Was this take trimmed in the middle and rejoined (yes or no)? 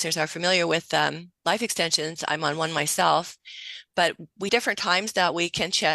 yes